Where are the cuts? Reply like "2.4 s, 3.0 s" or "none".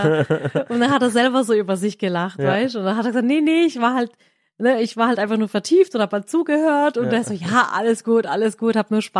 none

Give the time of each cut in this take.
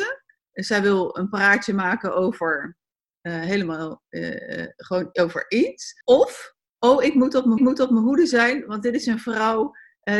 6.0 s, 7.6 s

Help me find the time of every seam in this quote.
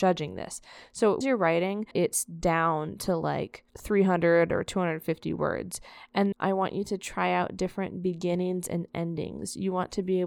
1.2 s, 1.9 s, 3.7 s, 6.3 s

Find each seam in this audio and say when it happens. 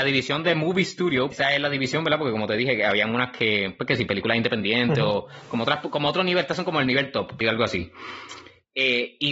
1.3 s, 7.4 s

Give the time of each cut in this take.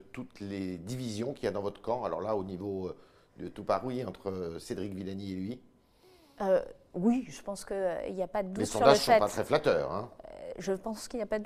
none

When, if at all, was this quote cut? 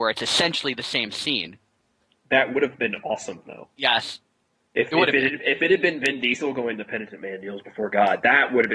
none

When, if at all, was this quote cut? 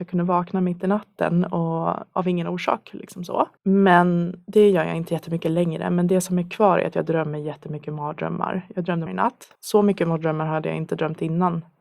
3.6 s, 9.1 s, 9.6 s

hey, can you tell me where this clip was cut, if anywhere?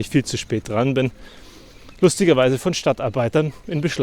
none

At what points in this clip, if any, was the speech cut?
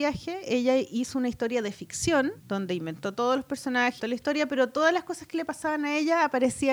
2.4 s, 4.0 s

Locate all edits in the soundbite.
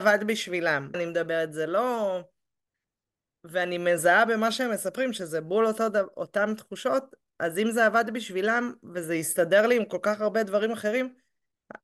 0.9 s

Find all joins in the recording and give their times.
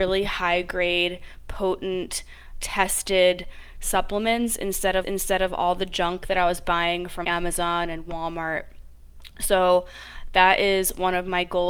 5.0 s, 7.2 s

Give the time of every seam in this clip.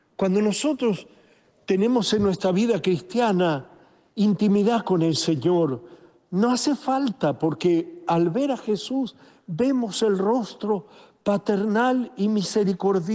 none

